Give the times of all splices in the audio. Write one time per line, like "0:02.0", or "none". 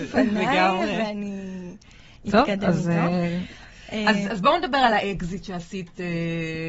none